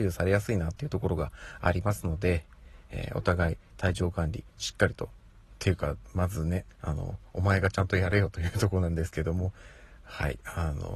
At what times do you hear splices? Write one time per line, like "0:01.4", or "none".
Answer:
0:06.7